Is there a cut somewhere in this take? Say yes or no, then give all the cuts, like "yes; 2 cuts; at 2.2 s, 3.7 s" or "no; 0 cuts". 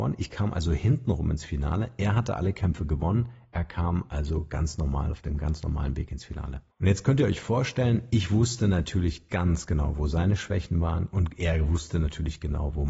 yes; 1 cut; at 6.7 s